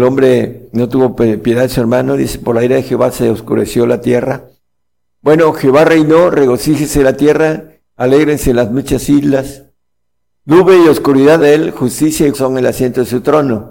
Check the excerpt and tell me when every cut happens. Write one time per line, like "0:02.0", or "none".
0:11.4
0:12.3